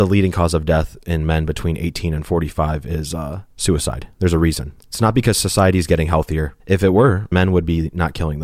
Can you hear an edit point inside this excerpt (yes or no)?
yes